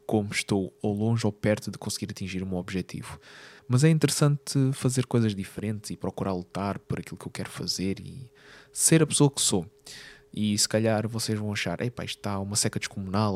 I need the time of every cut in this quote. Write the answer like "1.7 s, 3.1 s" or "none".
3.6 s